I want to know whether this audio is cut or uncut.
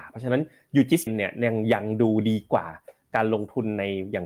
cut